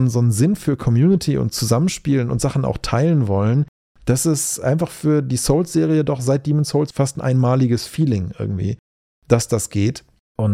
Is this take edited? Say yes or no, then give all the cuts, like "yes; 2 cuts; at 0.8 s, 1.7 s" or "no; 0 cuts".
no; 0 cuts